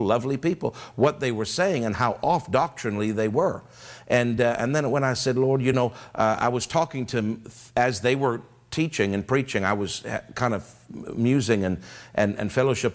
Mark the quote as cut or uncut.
uncut